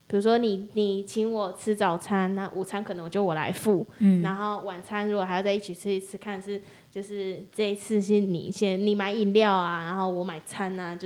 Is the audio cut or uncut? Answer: uncut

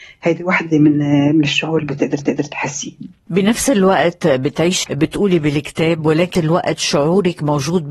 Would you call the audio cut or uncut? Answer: cut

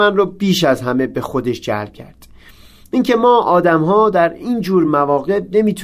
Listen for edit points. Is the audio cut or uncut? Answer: uncut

